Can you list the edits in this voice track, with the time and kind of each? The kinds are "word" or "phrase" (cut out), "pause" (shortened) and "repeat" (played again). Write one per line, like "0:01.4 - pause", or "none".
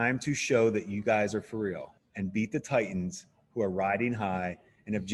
0:02.0 - pause